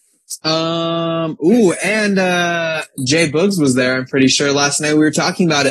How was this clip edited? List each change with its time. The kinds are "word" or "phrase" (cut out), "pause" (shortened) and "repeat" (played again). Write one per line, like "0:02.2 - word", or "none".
none